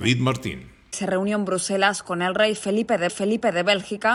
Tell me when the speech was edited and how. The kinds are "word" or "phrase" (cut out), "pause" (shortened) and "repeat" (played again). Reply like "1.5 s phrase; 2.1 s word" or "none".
3.1 s repeat

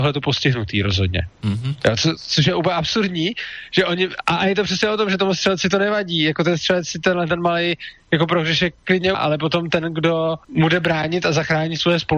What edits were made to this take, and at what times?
1.3 s pause; 9.1 s word; 10.4 s pause

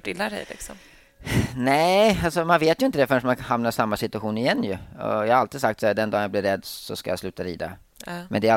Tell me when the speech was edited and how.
none

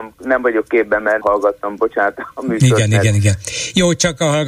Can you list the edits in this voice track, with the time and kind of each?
1.2 s word

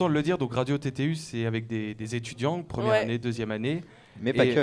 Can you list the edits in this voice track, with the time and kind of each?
none

